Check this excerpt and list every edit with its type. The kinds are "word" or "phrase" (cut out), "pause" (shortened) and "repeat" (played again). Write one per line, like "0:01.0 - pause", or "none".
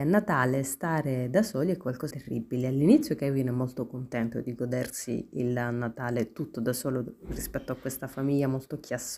0:02.1 - word